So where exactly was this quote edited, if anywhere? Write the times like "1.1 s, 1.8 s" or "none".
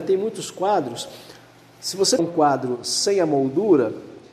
2.2 s